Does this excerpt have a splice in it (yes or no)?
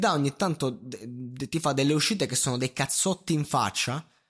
no